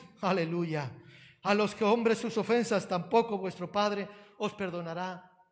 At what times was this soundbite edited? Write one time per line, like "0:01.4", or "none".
none